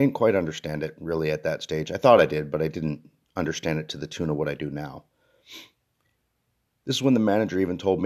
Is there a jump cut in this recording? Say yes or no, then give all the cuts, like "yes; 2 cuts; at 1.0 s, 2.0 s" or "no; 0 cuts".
no; 0 cuts